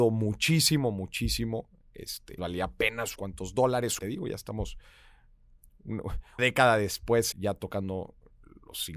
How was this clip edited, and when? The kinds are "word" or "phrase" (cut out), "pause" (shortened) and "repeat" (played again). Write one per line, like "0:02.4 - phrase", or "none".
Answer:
0:02.4 - word
0:03.1 - word
0:04.0 - word
0:06.4 - word
0:07.3 - word